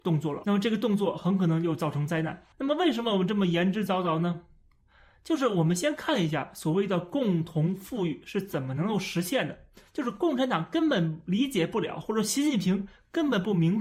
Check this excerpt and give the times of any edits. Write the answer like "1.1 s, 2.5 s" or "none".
2.5 s

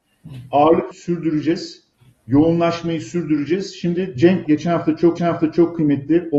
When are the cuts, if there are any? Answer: 0.9 s, 1.9 s, 4.5 s, 5.2 s

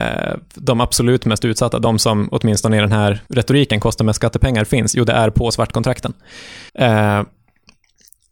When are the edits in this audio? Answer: 3.3 s, 6.7 s

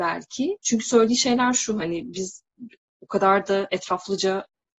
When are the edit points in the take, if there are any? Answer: none

